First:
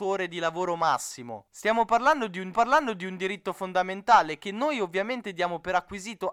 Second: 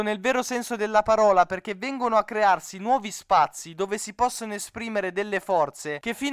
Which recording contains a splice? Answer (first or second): first